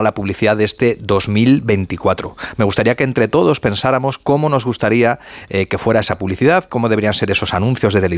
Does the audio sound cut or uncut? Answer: uncut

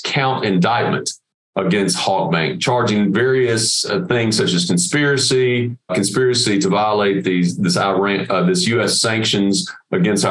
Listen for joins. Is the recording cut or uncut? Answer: cut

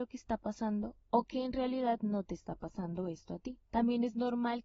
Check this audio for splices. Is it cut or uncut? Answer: cut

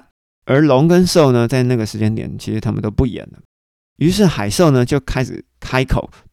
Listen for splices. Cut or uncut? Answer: uncut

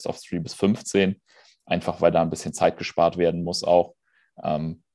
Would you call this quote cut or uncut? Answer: uncut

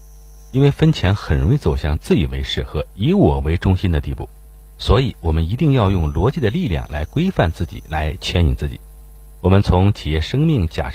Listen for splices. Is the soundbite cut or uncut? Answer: uncut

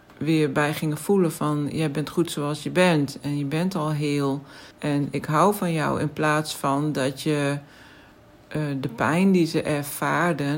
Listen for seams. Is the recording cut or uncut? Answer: cut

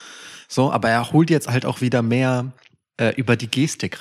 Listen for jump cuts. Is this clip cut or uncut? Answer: uncut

